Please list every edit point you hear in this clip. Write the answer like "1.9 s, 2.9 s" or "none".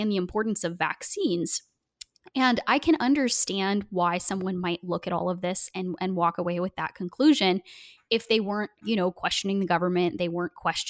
none